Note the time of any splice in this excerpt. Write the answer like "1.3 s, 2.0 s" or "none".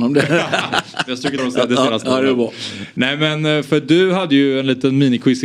1.4 s, 2.0 s